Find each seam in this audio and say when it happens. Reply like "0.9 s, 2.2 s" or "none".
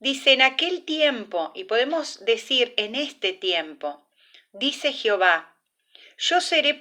none